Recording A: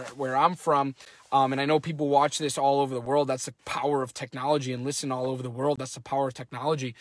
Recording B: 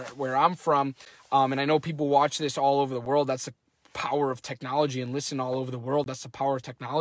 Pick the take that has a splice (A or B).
A